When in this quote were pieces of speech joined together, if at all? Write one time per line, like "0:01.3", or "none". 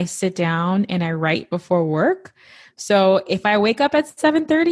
none